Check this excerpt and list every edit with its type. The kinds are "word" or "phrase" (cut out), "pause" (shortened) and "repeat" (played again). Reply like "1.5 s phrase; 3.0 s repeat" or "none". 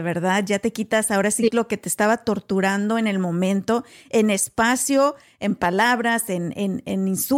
none